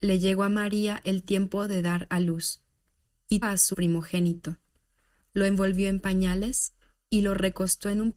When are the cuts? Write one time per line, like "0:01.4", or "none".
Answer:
0:03.4
0:03.7